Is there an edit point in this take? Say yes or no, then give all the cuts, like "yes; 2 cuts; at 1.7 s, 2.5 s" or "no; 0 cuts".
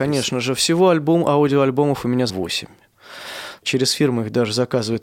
yes; 1 cut; at 2.3 s